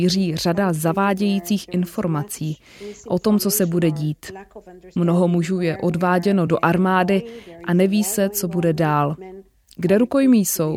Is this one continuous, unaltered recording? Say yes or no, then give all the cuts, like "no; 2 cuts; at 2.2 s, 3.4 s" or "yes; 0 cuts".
yes; 0 cuts